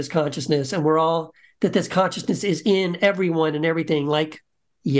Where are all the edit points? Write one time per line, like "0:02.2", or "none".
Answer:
none